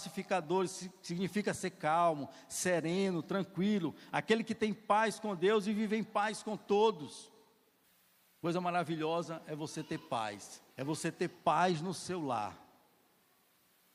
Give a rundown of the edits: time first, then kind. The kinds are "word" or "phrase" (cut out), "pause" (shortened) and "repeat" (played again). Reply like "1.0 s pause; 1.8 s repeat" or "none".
7.8 s pause; 10.7 s pause